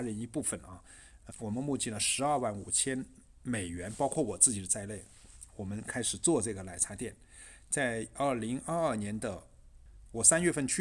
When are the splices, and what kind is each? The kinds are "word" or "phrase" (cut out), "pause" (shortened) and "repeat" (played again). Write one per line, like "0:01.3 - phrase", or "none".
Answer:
0:01.3 - word